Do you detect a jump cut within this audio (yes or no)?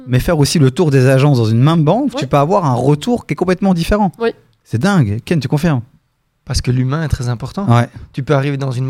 no